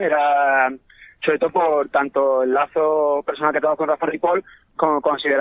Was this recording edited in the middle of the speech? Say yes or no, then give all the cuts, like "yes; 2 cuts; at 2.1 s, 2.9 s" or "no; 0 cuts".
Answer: no; 0 cuts